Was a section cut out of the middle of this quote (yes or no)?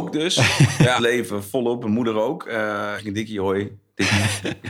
yes